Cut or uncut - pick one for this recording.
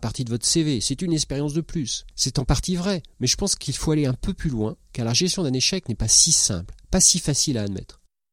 cut